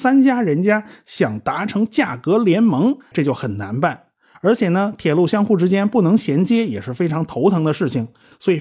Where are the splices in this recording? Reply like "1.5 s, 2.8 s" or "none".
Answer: 3.1 s